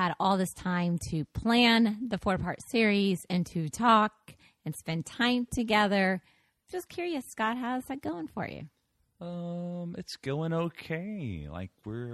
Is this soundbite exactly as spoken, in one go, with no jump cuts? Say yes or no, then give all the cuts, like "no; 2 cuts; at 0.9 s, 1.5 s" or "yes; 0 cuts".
yes; 0 cuts